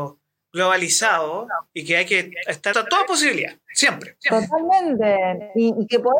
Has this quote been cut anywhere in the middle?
yes; 1 cut; at 2.7 s

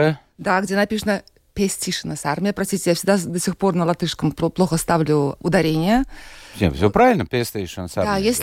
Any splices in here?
no; 0 cuts

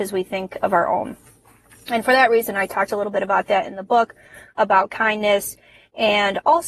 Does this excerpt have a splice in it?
no; 0 cuts

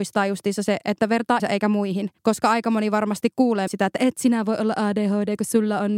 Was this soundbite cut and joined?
yes; 3 cuts; at 1.4 s, 2.2 s, 3.7 s

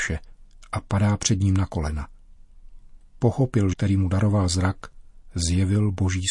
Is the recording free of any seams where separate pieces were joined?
no; 1 cut; at 3.7 s

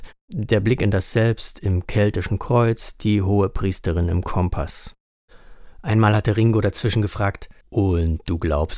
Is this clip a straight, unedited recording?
no; 1 cut; at 7.6 s

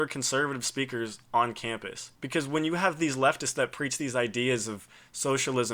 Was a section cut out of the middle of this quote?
yes; 1 cut; at 2.2 s

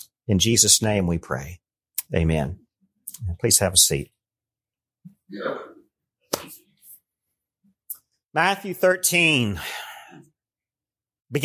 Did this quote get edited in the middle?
no; 0 cuts

